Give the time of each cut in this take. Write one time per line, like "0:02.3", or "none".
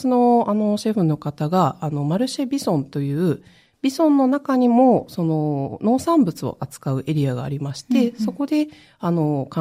none